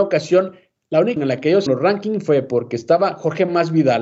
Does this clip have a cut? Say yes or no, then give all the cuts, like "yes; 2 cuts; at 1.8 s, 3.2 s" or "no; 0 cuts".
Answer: yes; 2 cuts; at 1.2 s, 1.7 s